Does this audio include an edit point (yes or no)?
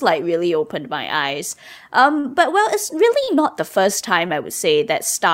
no